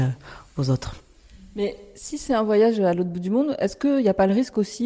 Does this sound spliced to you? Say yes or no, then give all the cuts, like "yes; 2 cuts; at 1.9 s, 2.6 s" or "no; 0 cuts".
no; 0 cuts